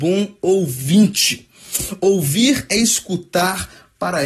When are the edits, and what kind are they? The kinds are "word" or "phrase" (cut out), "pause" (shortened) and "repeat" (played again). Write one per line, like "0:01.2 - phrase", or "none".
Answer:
none

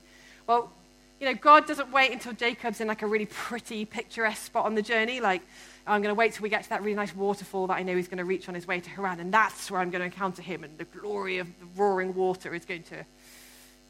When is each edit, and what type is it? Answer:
none

